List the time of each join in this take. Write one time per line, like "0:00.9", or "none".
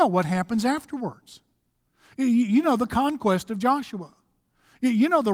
none